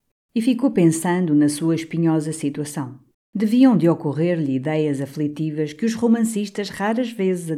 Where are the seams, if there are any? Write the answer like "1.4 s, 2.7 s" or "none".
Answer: 3.1 s

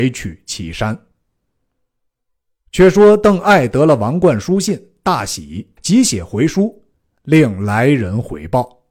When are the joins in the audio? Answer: 5.8 s

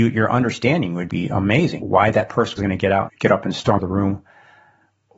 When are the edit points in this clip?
1.1 s, 1.8 s, 2.6 s, 3.1 s, 3.8 s

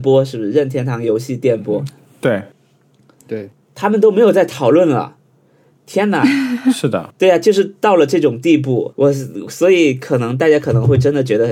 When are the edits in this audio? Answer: none

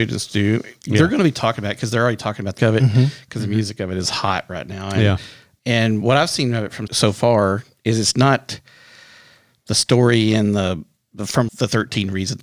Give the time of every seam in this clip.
2.6 s, 6.9 s, 11.5 s

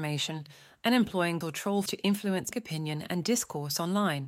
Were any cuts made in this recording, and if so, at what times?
1.4 s, 1.9 s, 2.5 s

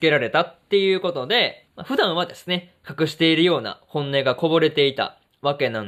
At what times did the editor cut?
1.7 s

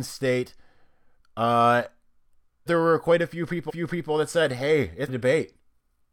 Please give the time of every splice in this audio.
2.7 s, 3.7 s, 5.1 s

